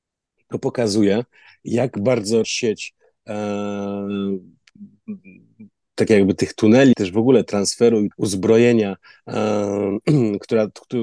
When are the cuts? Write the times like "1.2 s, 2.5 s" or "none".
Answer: 2.4 s, 6.9 s, 8.1 s